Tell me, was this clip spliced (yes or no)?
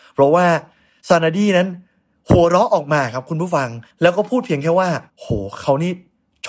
yes